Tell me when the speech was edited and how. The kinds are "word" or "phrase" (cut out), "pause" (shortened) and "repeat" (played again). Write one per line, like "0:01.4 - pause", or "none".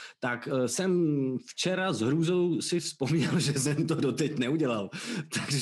none